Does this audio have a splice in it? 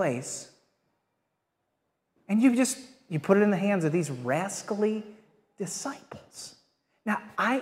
no; 0 cuts

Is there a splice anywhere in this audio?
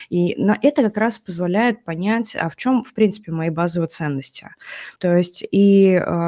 yes; 1 cut; at 5.0 s

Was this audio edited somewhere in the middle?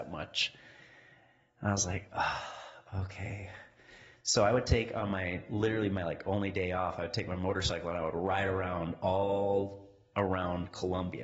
no; 0 cuts

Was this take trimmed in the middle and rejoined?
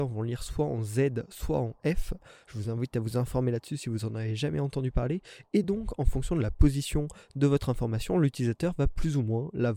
no; 0 cuts

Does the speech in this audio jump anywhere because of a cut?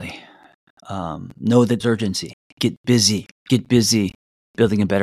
yes; 2 cuts; at 1.8 s, 3.4 s

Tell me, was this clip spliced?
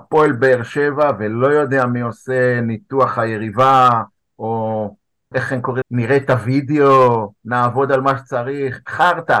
yes; 2 cuts; at 5.3 s, 5.8 s

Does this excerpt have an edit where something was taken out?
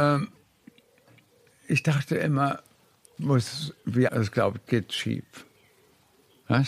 yes; 4 cuts; at 1.5 s, 3.2 s, 4.1 s, 4.7 s

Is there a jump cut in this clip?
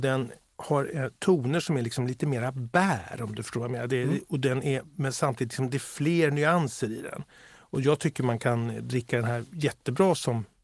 no; 0 cuts

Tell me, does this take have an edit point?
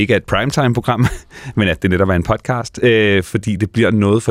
no; 0 cuts

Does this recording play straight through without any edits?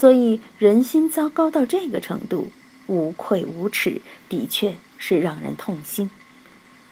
yes; 0 cuts

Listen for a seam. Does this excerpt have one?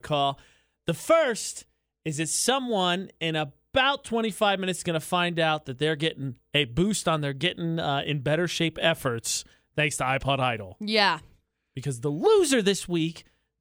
no; 0 cuts

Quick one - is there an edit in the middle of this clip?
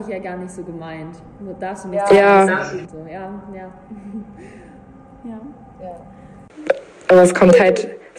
no; 0 cuts

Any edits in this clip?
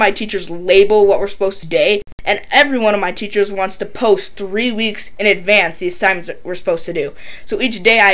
yes; 1 cut; at 1.6 s

